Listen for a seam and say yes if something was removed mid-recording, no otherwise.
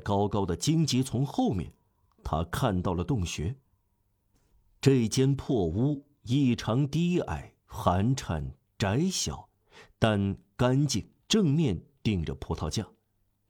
yes